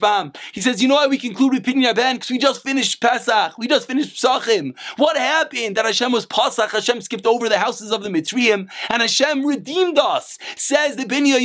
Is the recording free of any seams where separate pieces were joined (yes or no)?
yes